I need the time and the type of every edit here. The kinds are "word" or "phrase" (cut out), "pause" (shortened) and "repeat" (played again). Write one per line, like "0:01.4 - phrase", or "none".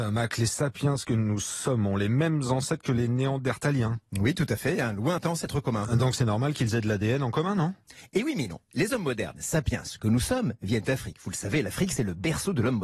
0:10.9 - word